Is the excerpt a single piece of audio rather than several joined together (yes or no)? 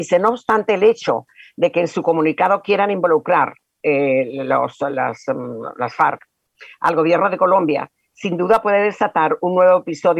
yes